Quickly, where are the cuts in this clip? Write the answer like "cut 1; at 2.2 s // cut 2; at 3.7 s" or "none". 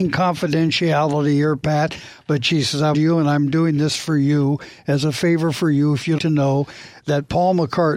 cut 1; at 2.9 s // cut 2; at 6.2 s